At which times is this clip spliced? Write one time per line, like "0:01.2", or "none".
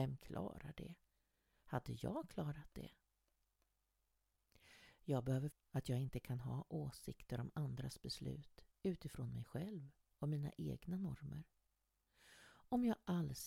0:05.5